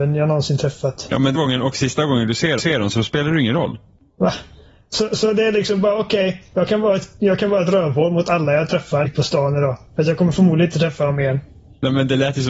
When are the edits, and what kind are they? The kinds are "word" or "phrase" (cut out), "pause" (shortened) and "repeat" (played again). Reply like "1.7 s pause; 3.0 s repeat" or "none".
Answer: 1.3 s phrase; 2.6 s repeat; 9.0 s phrase